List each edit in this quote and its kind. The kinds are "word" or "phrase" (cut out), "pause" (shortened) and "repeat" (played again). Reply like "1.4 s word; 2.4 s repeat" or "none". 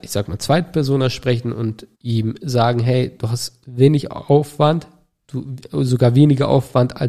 1.9 s pause